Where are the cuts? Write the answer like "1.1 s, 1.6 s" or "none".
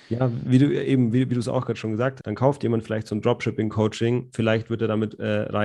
2.2 s